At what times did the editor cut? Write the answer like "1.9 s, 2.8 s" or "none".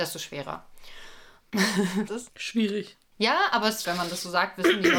2.1 s, 3.8 s